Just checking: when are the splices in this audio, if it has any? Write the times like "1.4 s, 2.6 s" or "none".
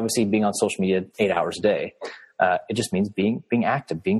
1.1 s

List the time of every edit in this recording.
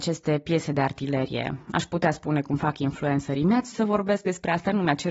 3.7 s

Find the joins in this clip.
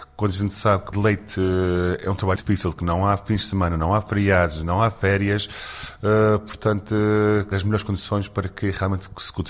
0.9 s, 2.4 s, 7.5 s

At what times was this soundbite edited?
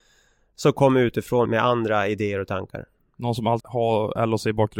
1.5 s, 3.6 s

